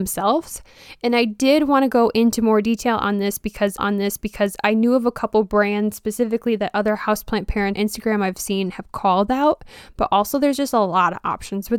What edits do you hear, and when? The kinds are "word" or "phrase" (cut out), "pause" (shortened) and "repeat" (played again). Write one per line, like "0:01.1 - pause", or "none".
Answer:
0:03.8 - repeat
0:07.8 - word